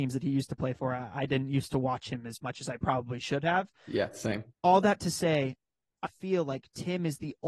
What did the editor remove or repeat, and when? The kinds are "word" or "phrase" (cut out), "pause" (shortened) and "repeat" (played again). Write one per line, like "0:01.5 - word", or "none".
0:04.5 - pause
0:06.0 - word